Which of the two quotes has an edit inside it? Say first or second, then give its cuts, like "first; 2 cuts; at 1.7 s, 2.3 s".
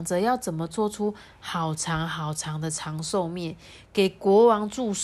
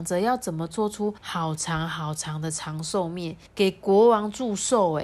second; 2 cuts; at 1.2 s, 3.5 s